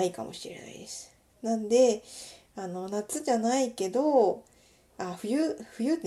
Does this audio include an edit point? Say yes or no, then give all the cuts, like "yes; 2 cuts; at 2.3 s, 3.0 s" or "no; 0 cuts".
no; 0 cuts